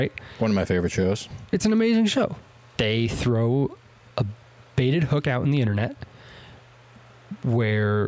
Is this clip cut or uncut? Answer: uncut